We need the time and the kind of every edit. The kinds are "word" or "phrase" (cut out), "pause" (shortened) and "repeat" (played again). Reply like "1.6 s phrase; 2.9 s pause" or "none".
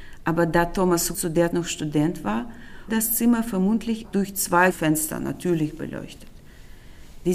1.1 s word; 1.5 s word; 2.9 s word; 4.0 s word; 4.7 s word